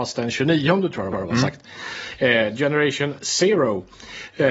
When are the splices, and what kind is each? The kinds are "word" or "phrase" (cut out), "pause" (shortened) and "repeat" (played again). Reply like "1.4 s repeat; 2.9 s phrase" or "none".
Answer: 1.1 s repeat